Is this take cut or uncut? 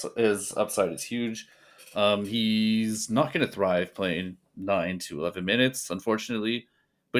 uncut